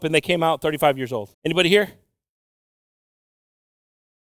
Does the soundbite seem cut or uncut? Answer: cut